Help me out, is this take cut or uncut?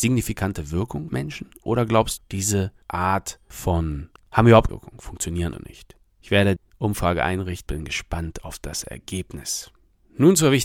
cut